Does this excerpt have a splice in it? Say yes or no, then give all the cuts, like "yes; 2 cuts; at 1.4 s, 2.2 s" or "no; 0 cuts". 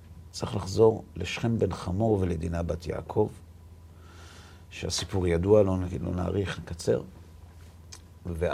no; 0 cuts